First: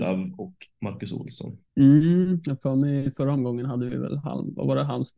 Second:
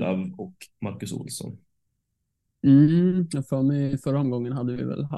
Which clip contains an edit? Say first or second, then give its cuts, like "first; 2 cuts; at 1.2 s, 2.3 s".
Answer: first; 1 cut; at 1.7 s